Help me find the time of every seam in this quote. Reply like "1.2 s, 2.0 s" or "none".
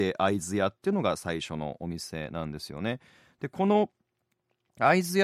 none